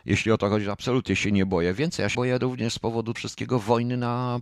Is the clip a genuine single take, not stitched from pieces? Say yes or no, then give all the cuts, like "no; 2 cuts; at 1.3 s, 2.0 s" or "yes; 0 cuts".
no; 2 cuts; at 2.1 s, 3.1 s